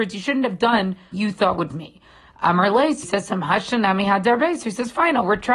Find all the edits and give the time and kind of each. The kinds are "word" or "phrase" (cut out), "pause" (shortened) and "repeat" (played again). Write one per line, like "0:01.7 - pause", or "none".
0:01.1 - word
0:01.7 - word
0:03.0 - word